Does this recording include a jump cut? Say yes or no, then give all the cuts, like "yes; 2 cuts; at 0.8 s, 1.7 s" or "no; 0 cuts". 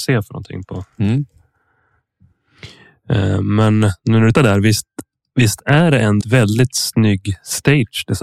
yes; 2 cuts; at 4.3 s, 6.2 s